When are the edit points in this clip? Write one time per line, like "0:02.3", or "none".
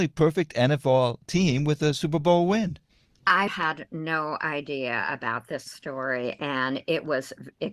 0:03.5